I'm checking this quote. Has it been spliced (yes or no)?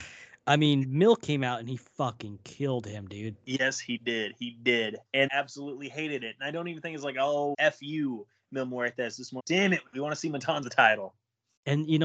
yes